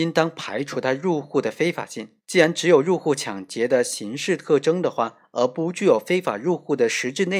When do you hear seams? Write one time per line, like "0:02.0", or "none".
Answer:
0:02.2